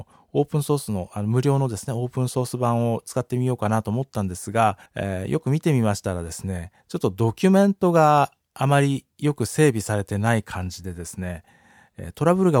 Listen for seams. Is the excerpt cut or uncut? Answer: cut